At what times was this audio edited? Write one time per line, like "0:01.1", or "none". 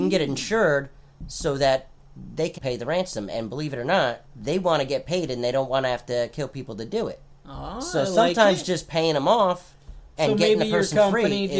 0:02.6
0:04.2